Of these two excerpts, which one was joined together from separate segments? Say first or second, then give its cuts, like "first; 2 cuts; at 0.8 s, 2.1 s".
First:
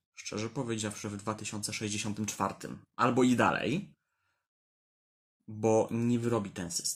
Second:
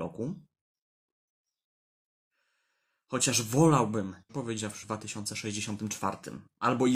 second; 2 cuts; at 4.3 s, 4.8 s